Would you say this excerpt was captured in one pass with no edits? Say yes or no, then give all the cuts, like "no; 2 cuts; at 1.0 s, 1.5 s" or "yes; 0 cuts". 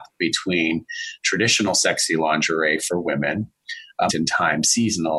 no; 1 cut; at 4.1 s